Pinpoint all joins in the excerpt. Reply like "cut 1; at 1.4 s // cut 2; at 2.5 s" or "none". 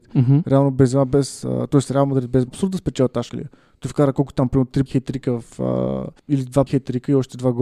cut 1; at 2.5 s // cut 2; at 3.3 s // cut 3; at 4.9 s // cut 4; at 6.2 s // cut 5; at 6.7 s